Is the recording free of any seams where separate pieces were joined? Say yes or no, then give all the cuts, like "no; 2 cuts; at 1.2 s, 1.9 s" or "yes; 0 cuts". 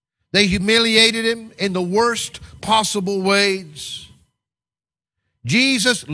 yes; 0 cuts